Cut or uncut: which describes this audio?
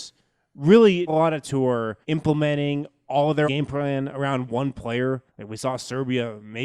cut